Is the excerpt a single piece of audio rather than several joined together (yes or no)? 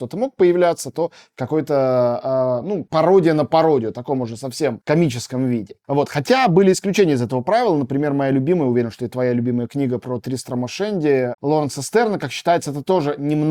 yes